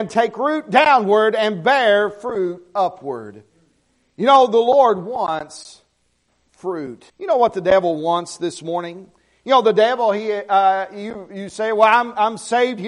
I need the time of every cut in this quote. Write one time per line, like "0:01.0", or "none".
0:07.1